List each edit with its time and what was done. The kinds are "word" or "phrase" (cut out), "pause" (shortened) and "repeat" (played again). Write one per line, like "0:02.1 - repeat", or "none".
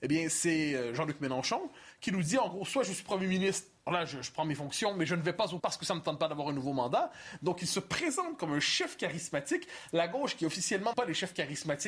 0:03.9 - word
0:05.6 - word
0:10.9 - word